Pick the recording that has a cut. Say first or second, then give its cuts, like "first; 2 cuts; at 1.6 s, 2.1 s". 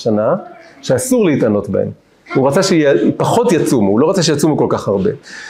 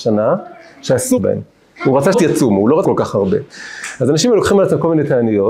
second; 3 cuts; at 1.2 s, 2.1 s, 2.8 s